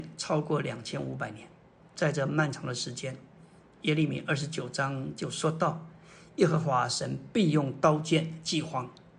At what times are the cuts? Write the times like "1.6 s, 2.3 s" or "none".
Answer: none